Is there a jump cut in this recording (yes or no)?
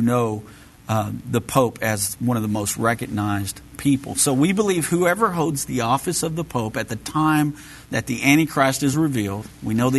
no